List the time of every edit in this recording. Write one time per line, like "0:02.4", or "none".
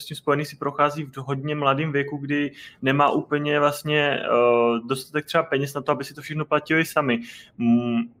none